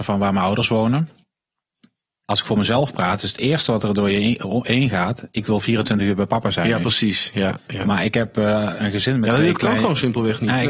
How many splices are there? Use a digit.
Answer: 1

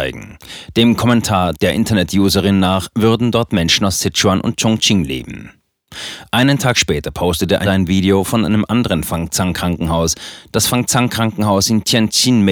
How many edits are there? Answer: 1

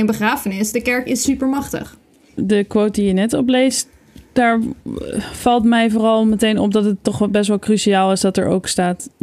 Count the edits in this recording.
0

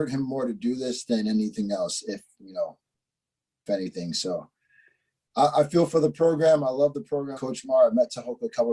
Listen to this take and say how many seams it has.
2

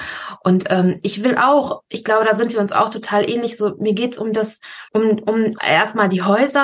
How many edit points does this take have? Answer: 2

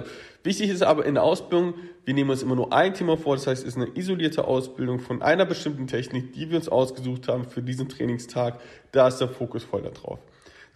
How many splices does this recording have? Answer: 0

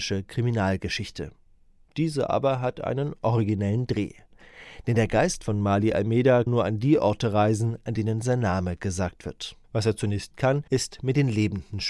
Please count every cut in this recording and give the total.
4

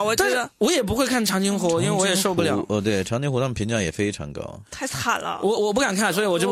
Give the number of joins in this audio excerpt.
0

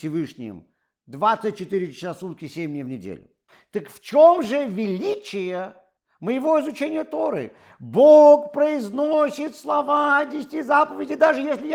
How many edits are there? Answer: 0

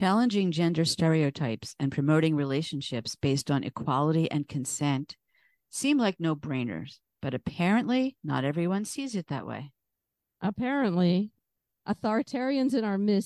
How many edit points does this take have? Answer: 0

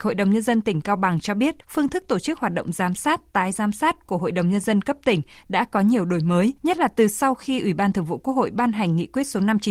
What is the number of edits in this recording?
2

